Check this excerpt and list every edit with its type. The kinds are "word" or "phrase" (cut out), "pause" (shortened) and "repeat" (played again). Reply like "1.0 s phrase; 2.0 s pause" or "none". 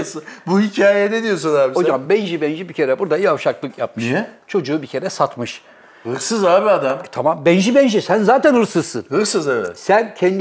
none